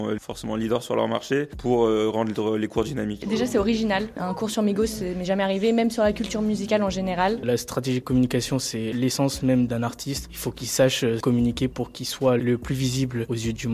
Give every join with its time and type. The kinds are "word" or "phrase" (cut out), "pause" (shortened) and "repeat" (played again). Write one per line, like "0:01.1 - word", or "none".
none